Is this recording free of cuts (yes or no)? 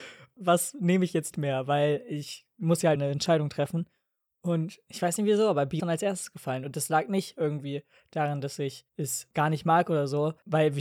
no